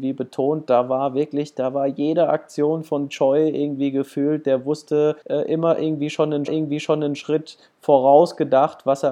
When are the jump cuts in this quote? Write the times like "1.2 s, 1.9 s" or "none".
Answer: 5.2 s, 6.5 s

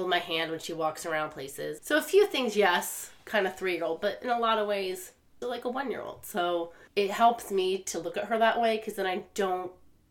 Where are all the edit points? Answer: 1.8 s, 5.4 s, 6.9 s

